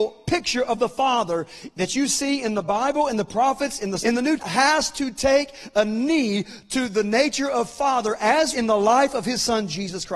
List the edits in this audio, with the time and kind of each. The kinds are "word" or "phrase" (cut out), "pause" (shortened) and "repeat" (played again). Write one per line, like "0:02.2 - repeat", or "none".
0:04.0 - word
0:04.4 - word
0:08.5 - word